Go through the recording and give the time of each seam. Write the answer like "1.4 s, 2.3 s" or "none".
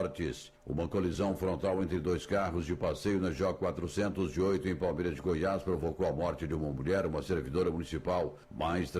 none